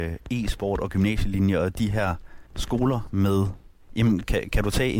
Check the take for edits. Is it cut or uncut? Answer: cut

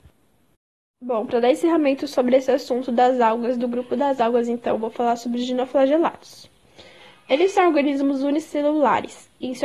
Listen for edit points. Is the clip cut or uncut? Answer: uncut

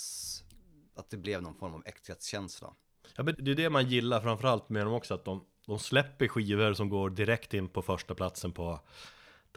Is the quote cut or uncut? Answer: cut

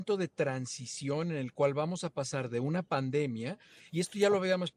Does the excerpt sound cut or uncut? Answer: uncut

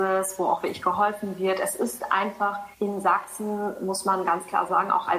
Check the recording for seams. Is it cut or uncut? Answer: cut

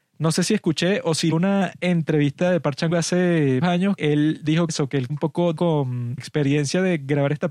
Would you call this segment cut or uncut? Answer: cut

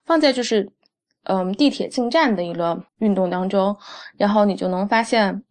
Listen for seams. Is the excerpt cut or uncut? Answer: cut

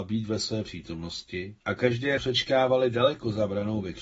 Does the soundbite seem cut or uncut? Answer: cut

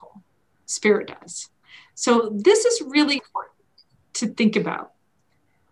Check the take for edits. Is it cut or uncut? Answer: cut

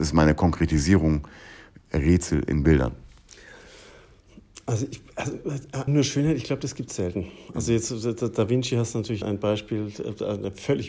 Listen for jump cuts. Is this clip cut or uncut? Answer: cut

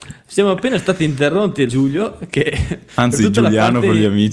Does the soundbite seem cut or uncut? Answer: cut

